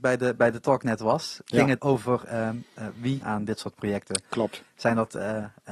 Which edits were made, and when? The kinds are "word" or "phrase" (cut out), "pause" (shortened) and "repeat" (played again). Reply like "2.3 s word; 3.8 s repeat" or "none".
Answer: 1.8 s word; 3.2 s phrase